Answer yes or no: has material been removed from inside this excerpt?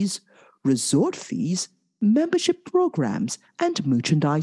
no